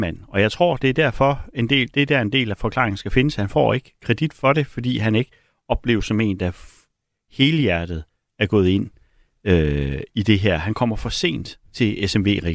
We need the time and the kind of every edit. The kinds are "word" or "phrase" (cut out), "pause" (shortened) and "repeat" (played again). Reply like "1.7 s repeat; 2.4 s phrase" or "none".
none